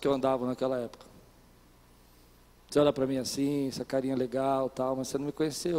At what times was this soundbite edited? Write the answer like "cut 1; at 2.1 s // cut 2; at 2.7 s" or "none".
none